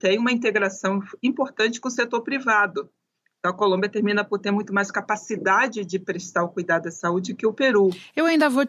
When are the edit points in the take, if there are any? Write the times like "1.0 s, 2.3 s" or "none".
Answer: none